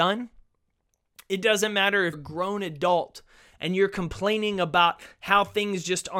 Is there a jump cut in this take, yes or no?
yes